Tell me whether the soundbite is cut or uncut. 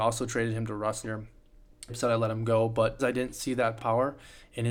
cut